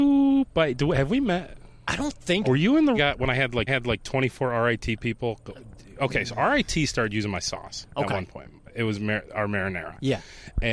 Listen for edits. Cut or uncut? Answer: cut